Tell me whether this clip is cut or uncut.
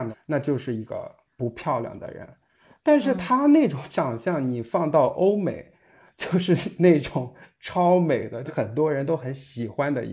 uncut